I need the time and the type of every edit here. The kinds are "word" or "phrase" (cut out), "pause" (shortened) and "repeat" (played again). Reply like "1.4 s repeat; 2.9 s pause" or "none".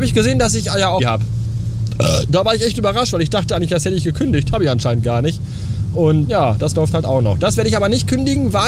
1.0 s phrase; 6.2 s word